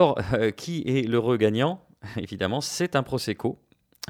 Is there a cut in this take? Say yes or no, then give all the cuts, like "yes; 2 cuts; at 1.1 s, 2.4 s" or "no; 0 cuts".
no; 0 cuts